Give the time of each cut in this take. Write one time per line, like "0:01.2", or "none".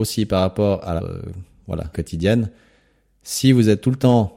0:01.0
0:01.9